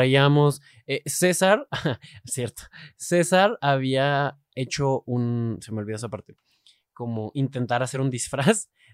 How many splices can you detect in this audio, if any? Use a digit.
0